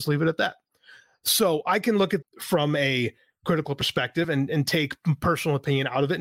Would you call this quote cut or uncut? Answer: cut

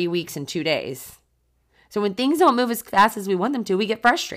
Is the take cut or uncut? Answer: uncut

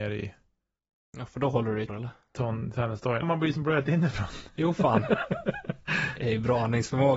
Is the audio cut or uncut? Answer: cut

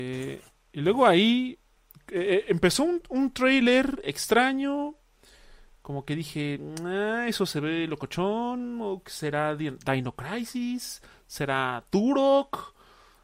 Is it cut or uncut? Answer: uncut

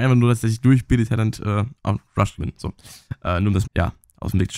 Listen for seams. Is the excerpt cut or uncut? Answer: cut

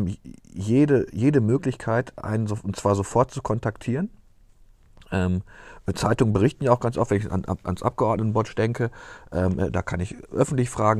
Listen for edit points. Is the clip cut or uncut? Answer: uncut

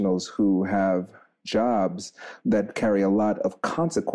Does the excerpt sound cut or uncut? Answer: uncut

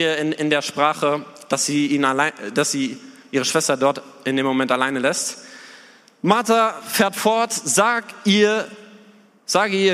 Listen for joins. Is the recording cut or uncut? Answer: uncut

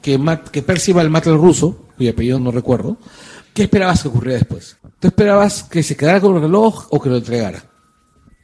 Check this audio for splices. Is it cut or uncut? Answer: cut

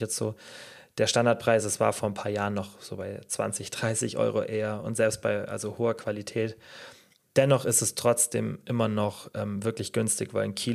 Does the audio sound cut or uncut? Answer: uncut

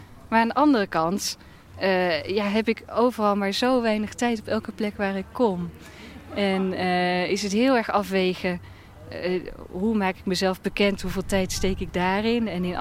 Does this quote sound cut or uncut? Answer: uncut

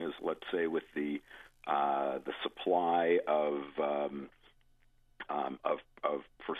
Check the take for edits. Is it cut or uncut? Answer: uncut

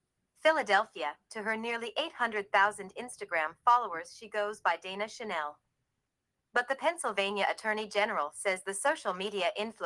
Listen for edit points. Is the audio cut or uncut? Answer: uncut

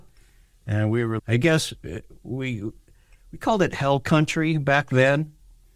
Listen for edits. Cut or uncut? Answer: cut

